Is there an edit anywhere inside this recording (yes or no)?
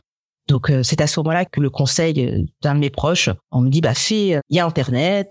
yes